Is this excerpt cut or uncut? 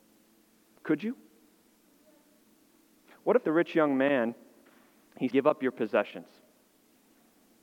cut